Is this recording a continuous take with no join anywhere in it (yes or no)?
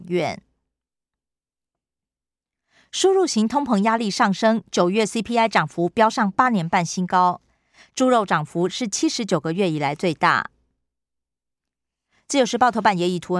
yes